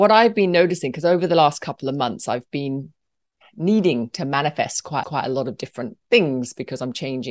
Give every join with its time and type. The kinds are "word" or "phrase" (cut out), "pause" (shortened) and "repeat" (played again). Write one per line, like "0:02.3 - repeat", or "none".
0:05.0 - repeat